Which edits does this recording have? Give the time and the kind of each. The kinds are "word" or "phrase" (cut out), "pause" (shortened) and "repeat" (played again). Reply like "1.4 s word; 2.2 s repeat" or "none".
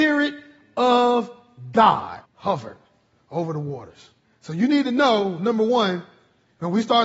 2.2 s pause; 4.2 s pause